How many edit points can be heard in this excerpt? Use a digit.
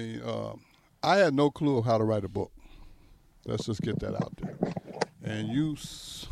0